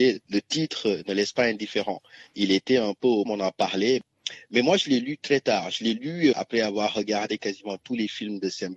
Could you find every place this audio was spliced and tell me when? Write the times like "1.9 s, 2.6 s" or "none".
3.3 s, 6.3 s